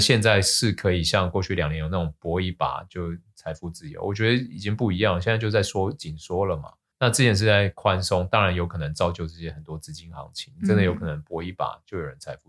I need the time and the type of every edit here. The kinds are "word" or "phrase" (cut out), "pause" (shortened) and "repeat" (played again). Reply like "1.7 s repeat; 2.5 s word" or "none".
6.9 s pause